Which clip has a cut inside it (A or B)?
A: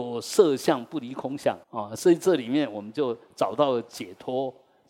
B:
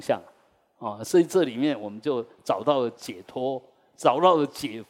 A